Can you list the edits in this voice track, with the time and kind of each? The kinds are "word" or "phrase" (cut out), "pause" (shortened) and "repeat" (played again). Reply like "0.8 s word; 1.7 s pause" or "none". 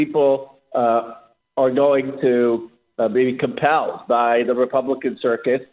none

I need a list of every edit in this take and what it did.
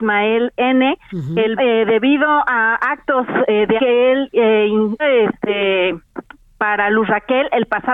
1.6 s word; 3.8 s word; 5.0 s word

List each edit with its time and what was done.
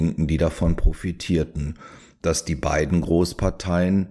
none

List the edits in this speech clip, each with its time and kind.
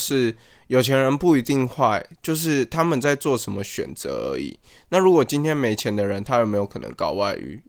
none

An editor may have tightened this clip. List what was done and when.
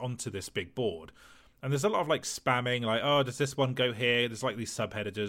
none

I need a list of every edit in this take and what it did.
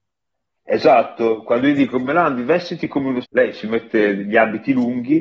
3.2 s word

